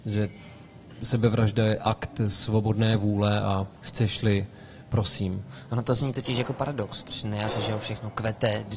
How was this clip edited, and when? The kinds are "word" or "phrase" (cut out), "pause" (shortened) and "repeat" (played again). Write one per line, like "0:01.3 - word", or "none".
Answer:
0:03.8 - pause